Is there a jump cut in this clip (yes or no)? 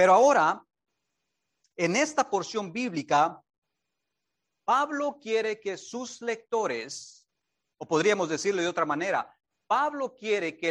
no